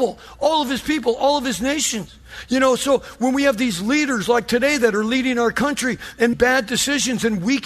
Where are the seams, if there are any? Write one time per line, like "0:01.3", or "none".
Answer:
0:06.3